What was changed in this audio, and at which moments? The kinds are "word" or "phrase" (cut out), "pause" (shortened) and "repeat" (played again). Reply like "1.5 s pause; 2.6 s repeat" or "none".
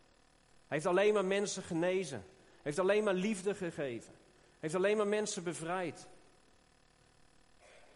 none